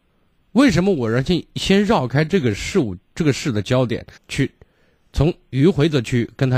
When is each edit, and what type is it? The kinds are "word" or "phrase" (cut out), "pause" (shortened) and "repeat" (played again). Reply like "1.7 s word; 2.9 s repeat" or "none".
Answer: 4.2 s pause

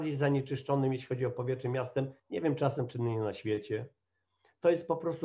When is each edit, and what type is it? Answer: 2.2 s pause

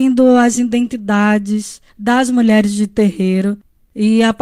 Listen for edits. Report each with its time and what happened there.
1.9 s pause

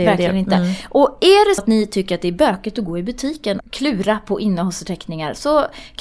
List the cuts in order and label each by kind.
1.6 s word; 3.6 s word

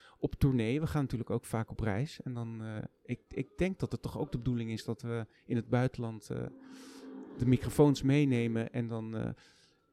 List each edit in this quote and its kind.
none

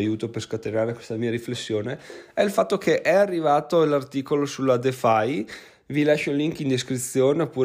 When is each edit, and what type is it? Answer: none

